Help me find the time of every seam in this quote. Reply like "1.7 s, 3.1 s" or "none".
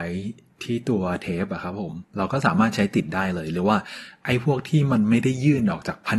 2.0 s